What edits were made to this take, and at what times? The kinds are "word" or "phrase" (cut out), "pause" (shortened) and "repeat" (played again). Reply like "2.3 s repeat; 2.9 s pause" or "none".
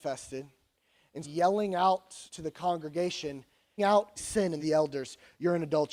1.2 s word; 2.3 s pause; 3.8 s word; 4.2 s word; 4.6 s phrase